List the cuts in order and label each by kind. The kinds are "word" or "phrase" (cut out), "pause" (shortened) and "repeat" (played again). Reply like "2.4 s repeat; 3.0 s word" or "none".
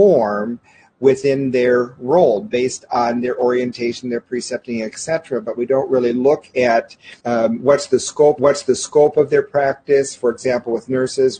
7.2 s pause; 8.4 s repeat